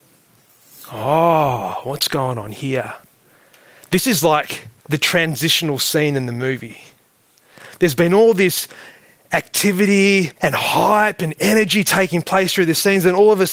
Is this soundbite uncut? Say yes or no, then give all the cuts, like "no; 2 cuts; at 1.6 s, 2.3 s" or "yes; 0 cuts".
no; 2 cuts; at 4.8 s, 10.4 s